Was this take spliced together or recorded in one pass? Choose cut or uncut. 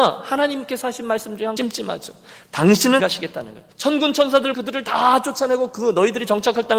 cut